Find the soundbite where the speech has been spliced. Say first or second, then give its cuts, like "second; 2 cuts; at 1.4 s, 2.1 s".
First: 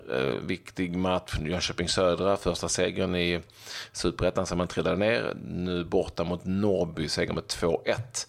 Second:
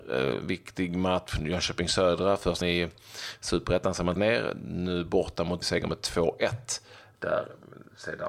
second; 3 cuts; at 2.6 s, 4.2 s, 5.6 s